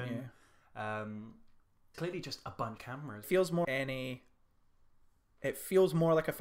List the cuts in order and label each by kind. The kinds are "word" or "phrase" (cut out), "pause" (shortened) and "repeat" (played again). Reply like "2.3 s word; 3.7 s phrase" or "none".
1.9 s word; 2.8 s word; 3.2 s word; 3.6 s word